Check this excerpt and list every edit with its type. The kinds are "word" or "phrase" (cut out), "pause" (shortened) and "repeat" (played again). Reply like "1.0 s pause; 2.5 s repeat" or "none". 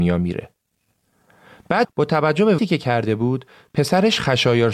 1.8 s word; 2.6 s word